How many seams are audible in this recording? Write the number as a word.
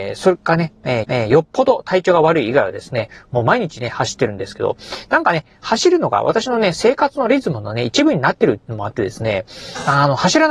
one